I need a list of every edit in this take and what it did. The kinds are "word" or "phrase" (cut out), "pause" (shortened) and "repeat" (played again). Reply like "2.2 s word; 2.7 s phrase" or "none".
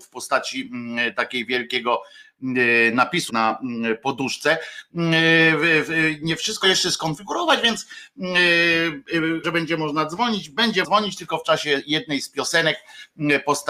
3.3 s word; 6.6 s phrase; 9.4 s word; 10.8 s word

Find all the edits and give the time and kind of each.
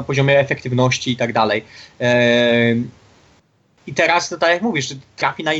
none

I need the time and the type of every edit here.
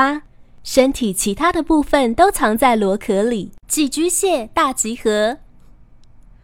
3.6 s pause

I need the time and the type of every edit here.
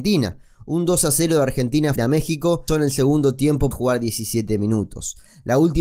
2.0 s word; 2.7 s word; 3.7 s word

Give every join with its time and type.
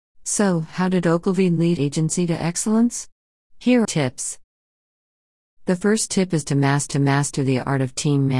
1.8 s word; 3.8 s phrase; 6.9 s repeat

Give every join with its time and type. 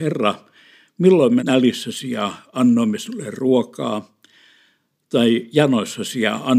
1.4 s phrase

